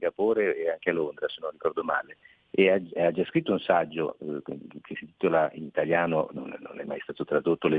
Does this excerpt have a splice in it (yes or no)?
no